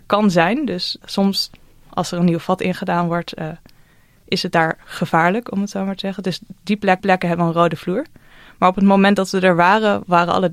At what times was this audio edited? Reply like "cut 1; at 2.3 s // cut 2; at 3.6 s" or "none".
cut 1; at 1.0 s // cut 2; at 7.0 s